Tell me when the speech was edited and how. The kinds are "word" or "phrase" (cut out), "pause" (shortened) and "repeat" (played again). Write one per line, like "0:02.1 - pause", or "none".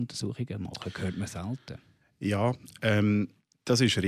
none